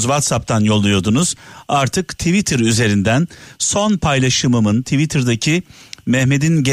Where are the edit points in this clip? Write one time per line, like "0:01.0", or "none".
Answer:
none

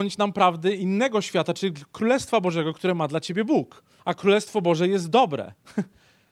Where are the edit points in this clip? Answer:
0:04.0

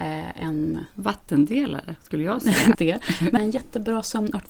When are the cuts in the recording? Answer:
0:00.9
0:02.7
0:03.4

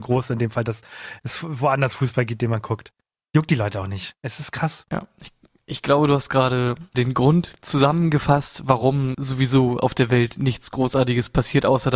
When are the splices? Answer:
none

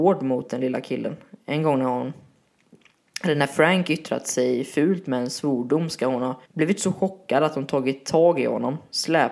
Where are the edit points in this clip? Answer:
0:06.5

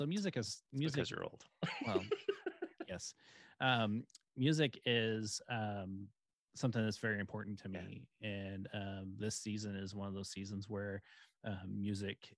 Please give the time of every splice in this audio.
none

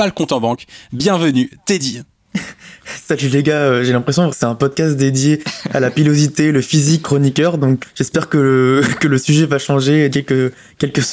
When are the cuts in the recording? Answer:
0:04.3
0:07.0
0:07.8
0:10.1

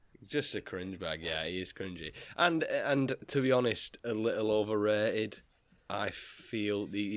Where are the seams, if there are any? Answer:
none

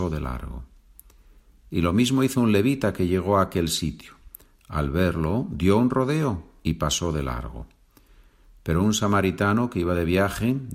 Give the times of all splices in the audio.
none

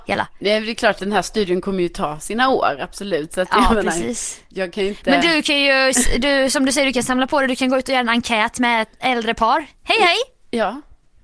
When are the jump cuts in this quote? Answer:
0:01.0

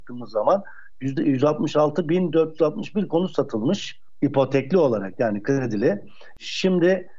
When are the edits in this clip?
none

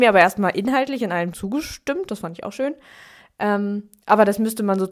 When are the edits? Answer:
0:01.3

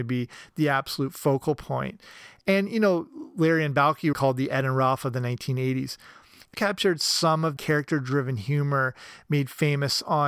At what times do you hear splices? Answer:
0:04.1
0:06.5
0:07.6

